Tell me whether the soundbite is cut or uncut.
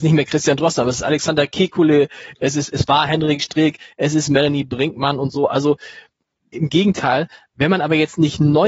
uncut